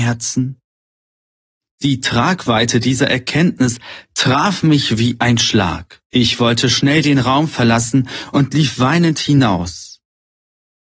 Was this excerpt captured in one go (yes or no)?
no